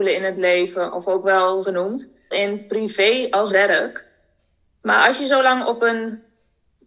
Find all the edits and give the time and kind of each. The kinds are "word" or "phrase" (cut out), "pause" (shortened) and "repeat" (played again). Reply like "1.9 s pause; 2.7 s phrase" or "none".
1.6 s word; 2.3 s word; 3.5 s word

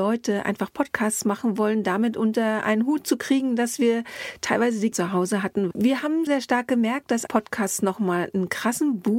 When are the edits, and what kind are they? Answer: 4.9 s word; 6.3 s word; 7.3 s word

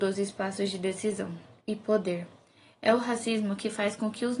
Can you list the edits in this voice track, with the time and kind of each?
1.6 s pause

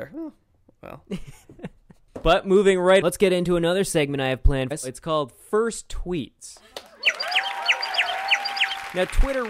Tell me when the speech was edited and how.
1.4 s pause; 3.0 s word; 4.7 s word

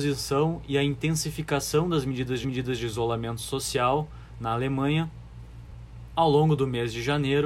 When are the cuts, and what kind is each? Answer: 2.4 s repeat

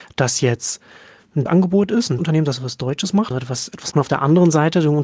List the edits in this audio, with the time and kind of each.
1.5 s word; 2.2 s word; 3.3 s word; 3.9 s word

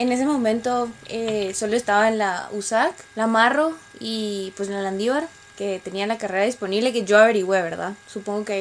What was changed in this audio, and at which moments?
none

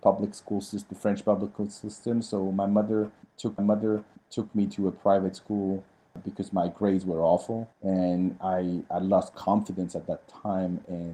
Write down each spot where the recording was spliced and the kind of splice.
3.6 s repeat; 7.7 s pause

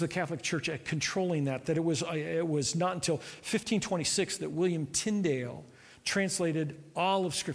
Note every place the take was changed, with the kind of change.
none

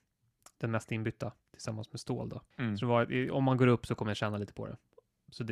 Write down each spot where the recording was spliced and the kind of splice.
1.4 s pause; 2.5 s pause

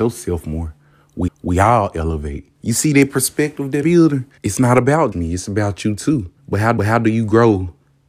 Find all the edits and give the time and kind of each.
1.3 s repeat; 2.6 s pause; 3.8 s word; 4.4 s pause; 5.1 s word; 6.4 s pause; 6.8 s repeat

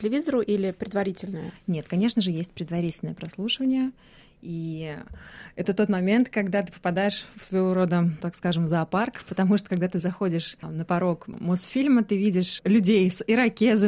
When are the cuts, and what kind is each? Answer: 8.2 s word

